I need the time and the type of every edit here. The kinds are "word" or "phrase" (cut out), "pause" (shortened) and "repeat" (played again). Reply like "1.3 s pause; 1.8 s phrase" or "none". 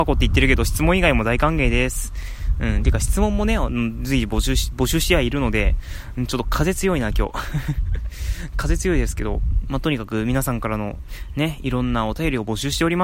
9.6 s word